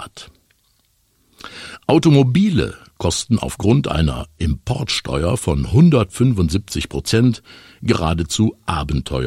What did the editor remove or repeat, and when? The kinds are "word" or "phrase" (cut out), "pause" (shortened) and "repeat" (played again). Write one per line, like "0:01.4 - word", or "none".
none